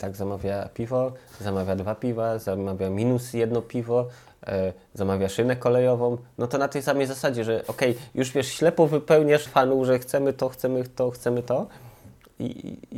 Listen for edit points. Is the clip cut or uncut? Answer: cut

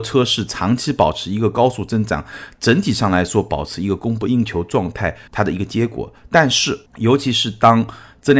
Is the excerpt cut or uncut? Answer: cut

